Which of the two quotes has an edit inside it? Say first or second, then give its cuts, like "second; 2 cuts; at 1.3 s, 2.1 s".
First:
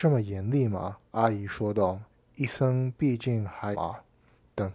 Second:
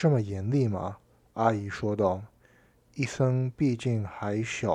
first; 3 cuts; at 1.1 s, 2.1 s, 3.7 s